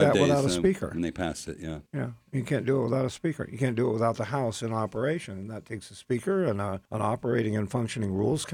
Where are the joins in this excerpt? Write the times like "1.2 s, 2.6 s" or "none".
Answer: 1.9 s, 6.9 s